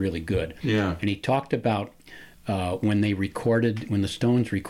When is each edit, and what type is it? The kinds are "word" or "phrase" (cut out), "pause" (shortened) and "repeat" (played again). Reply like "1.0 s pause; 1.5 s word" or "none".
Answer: none